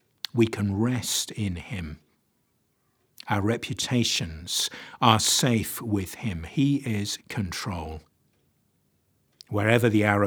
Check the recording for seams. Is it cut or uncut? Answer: cut